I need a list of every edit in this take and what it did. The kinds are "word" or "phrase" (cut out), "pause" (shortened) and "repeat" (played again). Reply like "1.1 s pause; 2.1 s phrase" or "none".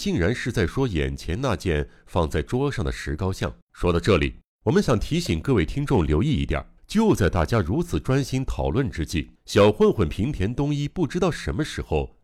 3.6 s pause; 4.5 s pause; 6.8 s pause; 9.4 s pause